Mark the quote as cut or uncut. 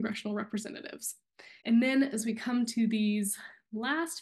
cut